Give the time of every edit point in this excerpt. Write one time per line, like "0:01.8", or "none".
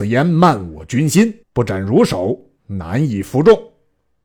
0:01.4
0:02.6